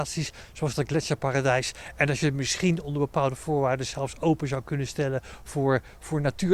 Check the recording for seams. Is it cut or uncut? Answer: uncut